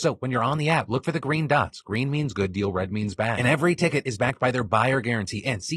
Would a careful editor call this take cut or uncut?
uncut